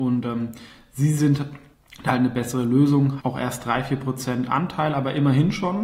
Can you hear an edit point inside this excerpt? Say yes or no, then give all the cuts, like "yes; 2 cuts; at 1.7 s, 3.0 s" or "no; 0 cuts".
yes; 2 cuts; at 1.7 s, 3.2 s